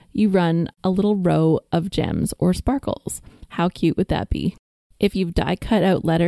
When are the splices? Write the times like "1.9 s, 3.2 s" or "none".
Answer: none